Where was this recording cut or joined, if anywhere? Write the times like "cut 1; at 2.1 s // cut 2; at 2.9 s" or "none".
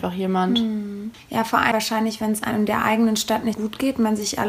cut 1; at 1.7 s // cut 2; at 2.5 s // cut 3; at 3.5 s